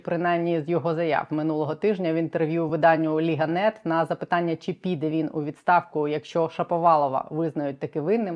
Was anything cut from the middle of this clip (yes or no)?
no